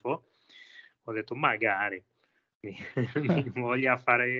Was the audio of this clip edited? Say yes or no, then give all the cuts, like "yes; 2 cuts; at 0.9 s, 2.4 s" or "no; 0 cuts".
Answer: no; 0 cuts